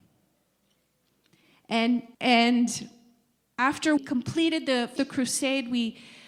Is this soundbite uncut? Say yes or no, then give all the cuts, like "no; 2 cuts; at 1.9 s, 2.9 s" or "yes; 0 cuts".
no; 3 cuts; at 2.1 s, 4.0 s, 5.0 s